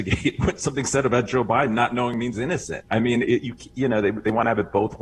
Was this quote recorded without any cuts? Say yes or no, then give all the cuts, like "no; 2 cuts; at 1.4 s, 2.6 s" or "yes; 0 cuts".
no; 1 cut; at 2.3 s